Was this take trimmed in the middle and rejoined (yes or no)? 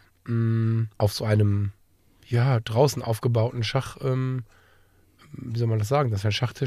yes